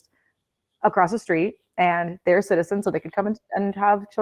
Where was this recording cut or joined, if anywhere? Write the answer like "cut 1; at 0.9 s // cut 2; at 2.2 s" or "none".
none

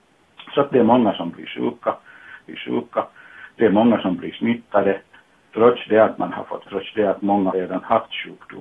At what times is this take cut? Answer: cut 1; at 2.5 s // cut 2; at 6.7 s // cut 3; at 7.5 s

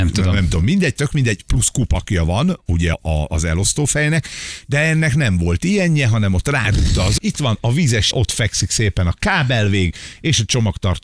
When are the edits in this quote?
cut 1; at 2.9 s // cut 2; at 7.2 s // cut 3; at 8.1 s

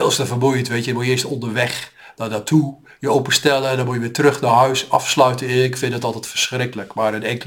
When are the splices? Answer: none

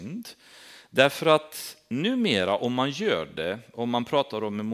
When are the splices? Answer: none

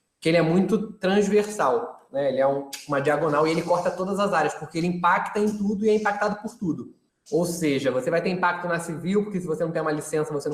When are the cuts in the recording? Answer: cut 1; at 7.1 s

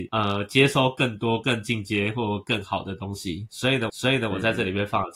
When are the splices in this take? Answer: cut 1; at 3.9 s

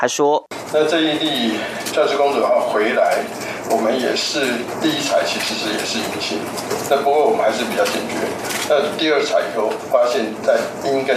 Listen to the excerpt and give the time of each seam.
cut 1; at 1.9 s

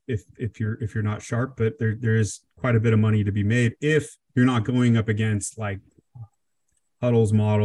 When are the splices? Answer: cut 1; at 4.2 s

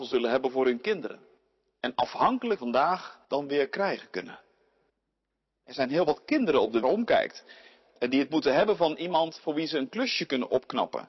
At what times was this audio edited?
cut 1; at 1.4 s // cut 2; at 2.6 s // cut 3; at 3.2 s // cut 4; at 4.9 s // cut 5; at 6.8 s

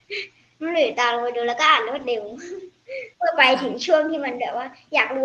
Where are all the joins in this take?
cut 1; at 3.1 s

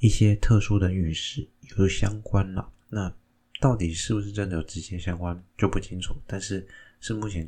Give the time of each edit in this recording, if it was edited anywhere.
cut 1; at 5.5 s

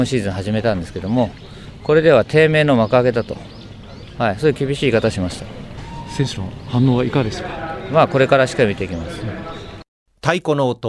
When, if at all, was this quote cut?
none

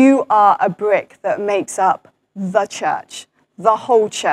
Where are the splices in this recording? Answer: none

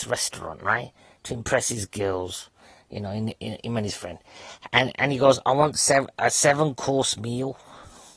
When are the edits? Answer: none

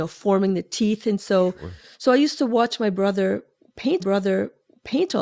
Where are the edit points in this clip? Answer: cut 1; at 4.0 s

